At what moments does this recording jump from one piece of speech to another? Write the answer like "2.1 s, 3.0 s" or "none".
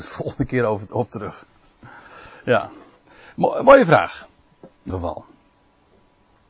4.9 s